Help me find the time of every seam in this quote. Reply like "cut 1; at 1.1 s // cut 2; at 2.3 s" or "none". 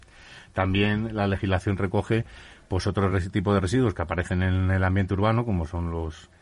none